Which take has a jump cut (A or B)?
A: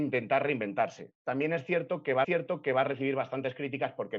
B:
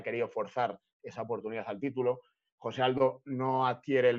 A